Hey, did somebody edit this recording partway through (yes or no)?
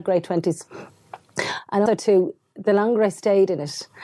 yes